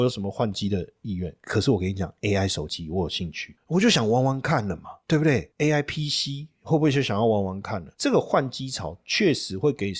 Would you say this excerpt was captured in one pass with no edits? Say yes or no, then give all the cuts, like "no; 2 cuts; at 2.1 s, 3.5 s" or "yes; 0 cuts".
no; 1 cut; at 7.9 s